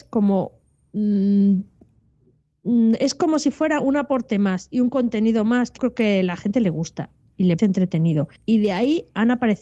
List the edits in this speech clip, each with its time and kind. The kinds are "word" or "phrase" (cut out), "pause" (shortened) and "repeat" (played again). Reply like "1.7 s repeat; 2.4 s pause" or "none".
5.8 s word; 7.6 s word; 8.4 s pause